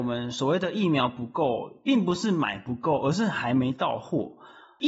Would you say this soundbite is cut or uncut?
uncut